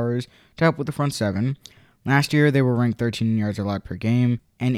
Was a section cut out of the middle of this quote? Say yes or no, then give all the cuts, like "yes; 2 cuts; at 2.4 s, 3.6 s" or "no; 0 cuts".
no; 0 cuts